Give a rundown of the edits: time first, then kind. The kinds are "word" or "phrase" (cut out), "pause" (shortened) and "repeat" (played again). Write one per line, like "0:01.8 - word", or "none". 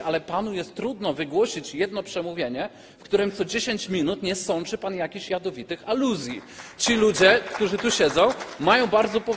none